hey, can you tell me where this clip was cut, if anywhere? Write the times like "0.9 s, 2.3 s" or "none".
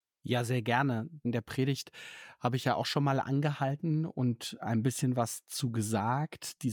none